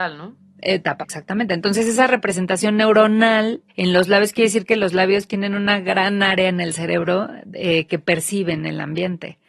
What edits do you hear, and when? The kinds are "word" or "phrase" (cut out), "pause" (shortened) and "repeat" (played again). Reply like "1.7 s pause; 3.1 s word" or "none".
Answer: 1.0 s word; 3.7 s pause

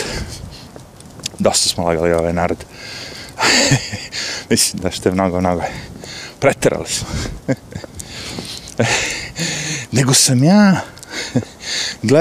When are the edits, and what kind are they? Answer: none

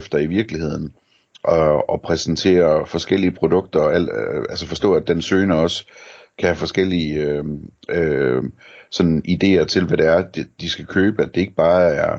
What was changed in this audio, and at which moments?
none

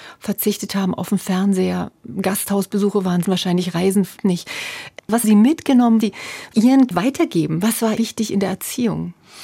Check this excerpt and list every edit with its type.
3.2 s word; 4.2 s word; 5.2 s word; 6.0 s word; 6.9 s word; 8.0 s word

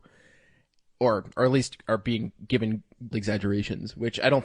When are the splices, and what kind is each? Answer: 1.4 s word; 3.1 s word

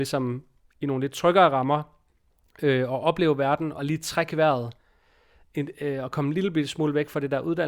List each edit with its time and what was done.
none

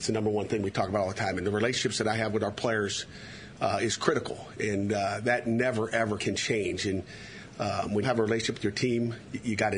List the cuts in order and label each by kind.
6.2 s word; 8.0 s phrase

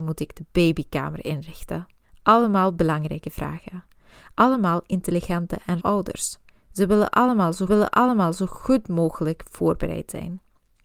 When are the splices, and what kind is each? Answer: 2.0 s pause; 5.8 s word; 7.7 s repeat

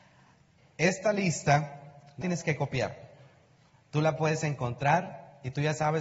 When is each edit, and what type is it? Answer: 2.2 s word

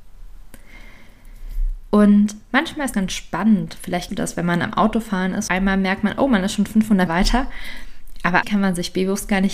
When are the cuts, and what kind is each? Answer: 2.9 s word; 4.1 s word; 5.5 s phrase; 7.1 s word; 8.4 s word

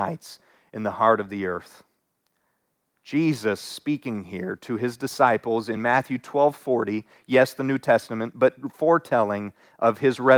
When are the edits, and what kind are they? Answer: none

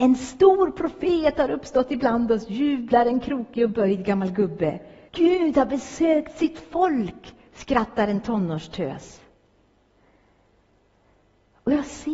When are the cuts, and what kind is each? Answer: 5.1 s pause

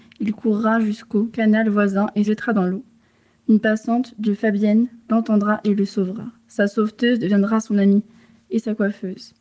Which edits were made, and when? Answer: 2.3 s word; 4.3 s word

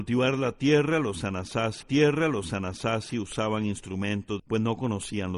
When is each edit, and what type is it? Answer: 1.8 s repeat; 4.4 s phrase

